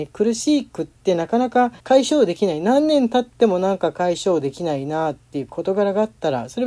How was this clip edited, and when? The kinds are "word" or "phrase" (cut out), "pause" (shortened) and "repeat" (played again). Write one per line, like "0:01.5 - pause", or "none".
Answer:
0:01.8 - pause